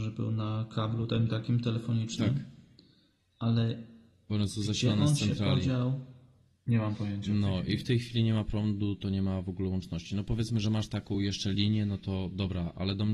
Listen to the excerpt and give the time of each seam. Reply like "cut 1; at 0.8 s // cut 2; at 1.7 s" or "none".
none